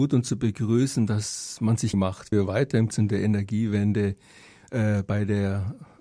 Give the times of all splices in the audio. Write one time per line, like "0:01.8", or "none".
0:01.9
0:02.3
0:02.9